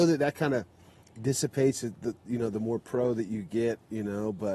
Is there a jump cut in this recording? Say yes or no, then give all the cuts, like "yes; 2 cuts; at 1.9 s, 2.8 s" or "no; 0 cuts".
no; 0 cuts